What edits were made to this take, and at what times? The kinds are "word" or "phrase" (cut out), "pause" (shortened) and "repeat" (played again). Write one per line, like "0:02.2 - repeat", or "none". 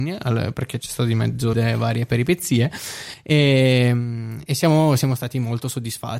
0:01.5 - phrase